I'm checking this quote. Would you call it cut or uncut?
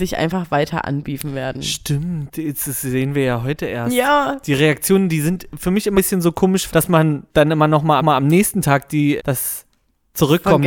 cut